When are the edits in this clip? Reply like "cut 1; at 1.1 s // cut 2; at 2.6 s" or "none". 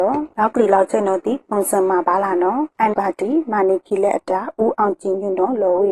cut 1; at 2.9 s